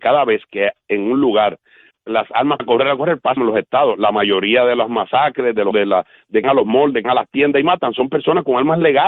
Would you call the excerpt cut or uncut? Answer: cut